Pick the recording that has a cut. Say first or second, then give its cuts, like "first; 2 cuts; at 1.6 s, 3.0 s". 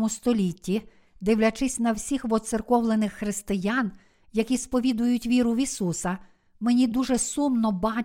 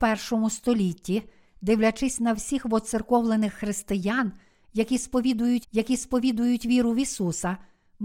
second; 1 cut; at 5.6 s